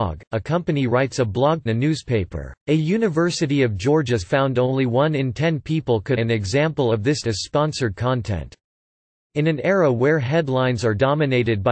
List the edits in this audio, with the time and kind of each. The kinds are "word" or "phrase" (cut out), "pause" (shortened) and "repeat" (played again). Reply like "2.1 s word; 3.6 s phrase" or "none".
1.7 s phrase; 2.6 s pause; 4.2 s word; 6.2 s word; 7.2 s phrase